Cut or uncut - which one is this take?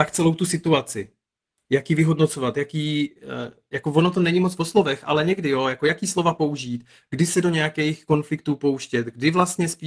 uncut